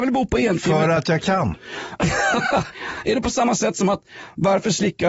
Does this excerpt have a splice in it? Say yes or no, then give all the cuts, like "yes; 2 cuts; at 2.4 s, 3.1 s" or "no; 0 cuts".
no; 0 cuts